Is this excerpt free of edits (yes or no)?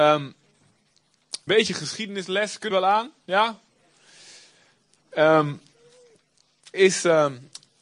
no